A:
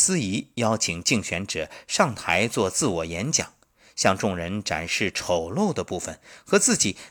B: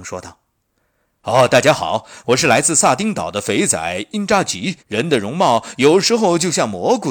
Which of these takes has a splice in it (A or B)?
B